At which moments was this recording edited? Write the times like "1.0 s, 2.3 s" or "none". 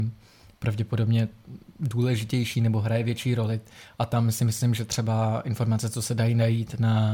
1.7 s